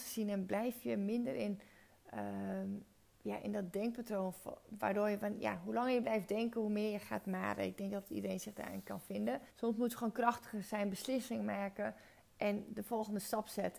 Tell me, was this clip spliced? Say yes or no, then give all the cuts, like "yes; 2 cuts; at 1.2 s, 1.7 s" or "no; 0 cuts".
yes; 1 cut; at 9.5 s